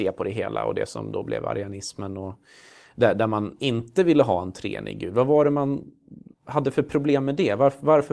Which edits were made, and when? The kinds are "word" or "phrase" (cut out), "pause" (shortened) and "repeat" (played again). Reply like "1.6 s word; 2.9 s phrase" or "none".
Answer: 6.3 s pause